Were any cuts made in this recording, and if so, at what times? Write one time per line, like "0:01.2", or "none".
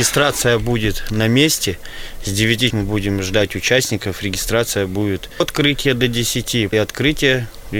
0:02.7
0:05.4
0:06.7